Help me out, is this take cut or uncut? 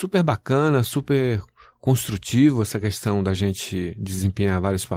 uncut